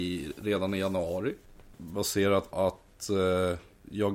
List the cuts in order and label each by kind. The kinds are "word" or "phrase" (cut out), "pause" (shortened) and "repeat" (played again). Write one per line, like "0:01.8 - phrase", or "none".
0:02.5 - word